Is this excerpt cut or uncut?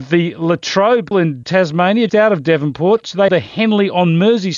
cut